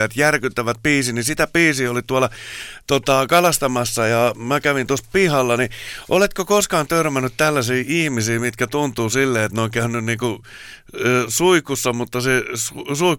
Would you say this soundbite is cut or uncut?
uncut